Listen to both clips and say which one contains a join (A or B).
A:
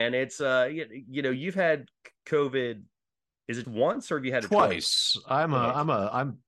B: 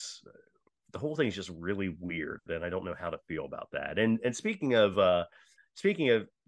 A